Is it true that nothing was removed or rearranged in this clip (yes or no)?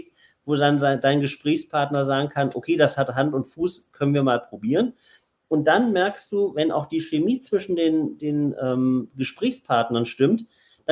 yes